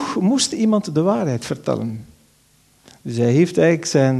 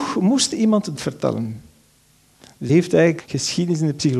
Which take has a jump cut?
second; 3 cuts; at 1.0 s, 2.7 s, 3.2 s

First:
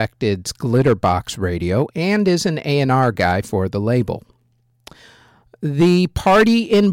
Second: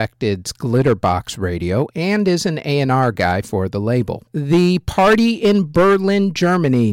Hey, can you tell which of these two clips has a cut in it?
second; 1 cut; at 4.3 s

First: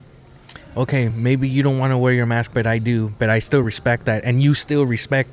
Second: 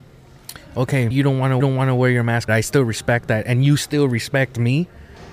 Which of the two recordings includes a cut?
second; 3 cuts; at 1.1 s, 1.6 s, 2.5 s

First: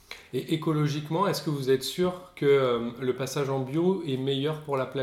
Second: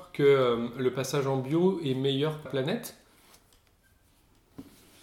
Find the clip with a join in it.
second; 1 cut; at 2.5 s

